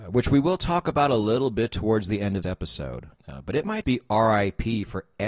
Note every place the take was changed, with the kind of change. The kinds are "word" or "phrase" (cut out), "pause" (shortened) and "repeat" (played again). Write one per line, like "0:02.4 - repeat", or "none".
0:02.4 - word
0:03.2 - pause
0:03.8 - word